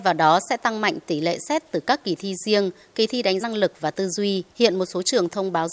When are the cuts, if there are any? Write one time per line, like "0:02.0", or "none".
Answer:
0:03.4
0:04.5

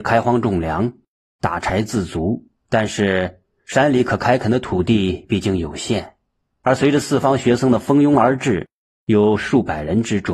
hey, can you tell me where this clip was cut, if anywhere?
0:02.6

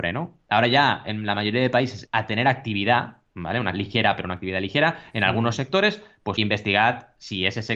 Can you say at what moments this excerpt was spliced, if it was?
0:02.1
0:03.7
0:06.4

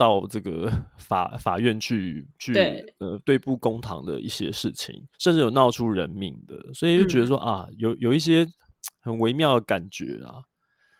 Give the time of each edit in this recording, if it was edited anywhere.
0:05.1

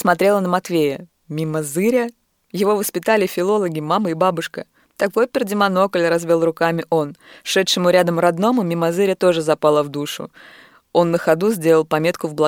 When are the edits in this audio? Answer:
none

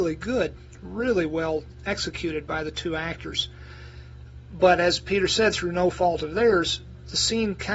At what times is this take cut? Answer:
none

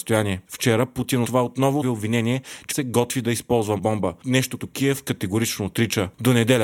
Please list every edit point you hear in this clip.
0:01.2
0:01.8
0:02.7
0:03.8
0:04.6

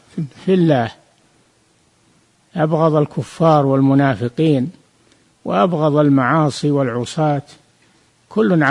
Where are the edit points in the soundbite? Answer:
none

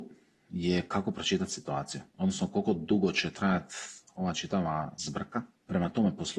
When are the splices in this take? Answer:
none

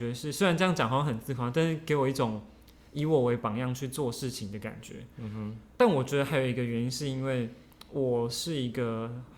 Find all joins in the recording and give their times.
0:05.7

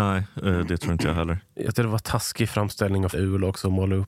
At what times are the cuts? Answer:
0:01.7
0:03.1

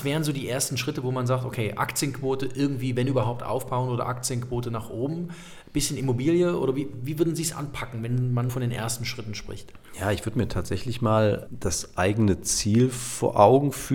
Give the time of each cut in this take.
0:08.5
0:11.5

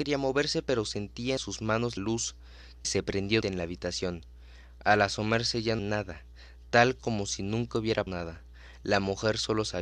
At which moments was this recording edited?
0:01.4
0:02.0
0:02.8
0:03.4
0:05.8
0:08.1

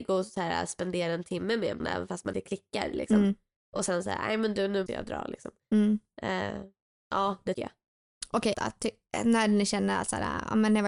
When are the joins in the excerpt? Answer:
0:01.8
0:02.3
0:04.9
0:07.5
0:08.5

